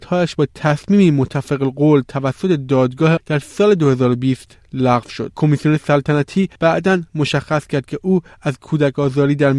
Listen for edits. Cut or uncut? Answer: cut